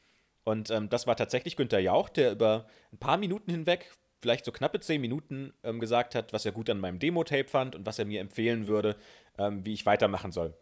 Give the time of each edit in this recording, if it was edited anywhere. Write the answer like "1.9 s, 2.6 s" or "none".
none